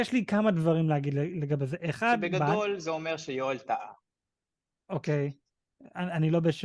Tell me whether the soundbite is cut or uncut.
uncut